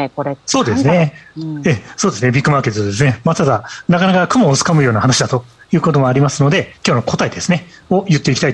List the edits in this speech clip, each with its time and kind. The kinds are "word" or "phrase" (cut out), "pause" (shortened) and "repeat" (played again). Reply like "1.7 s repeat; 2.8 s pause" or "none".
6.8 s pause